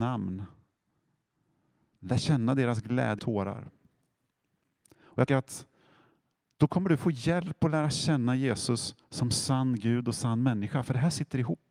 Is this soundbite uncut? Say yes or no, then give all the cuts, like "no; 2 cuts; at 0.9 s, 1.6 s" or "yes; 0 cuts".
no; 3 cuts; at 3.2 s, 5.3 s, 9.0 s